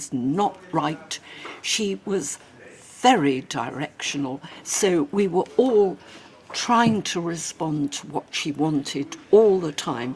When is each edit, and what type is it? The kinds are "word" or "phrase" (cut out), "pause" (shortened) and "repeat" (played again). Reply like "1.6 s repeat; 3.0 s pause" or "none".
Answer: none